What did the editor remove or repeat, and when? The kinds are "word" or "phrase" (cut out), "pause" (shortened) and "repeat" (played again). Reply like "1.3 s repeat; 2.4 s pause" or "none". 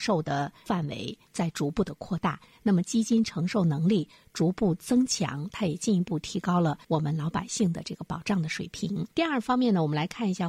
6.8 s pause; 9.1 s pause